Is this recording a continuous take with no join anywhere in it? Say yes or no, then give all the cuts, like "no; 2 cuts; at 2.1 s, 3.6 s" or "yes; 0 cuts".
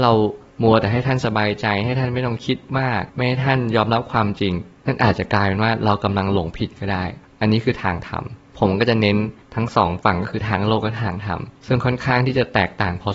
no; 1 cut; at 3.1 s